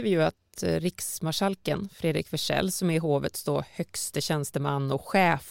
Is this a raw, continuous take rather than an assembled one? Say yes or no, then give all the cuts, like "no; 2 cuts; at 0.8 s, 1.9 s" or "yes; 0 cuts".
yes; 0 cuts